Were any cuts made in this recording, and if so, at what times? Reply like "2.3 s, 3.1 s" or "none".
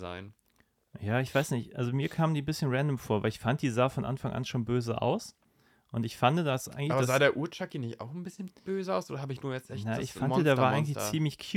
none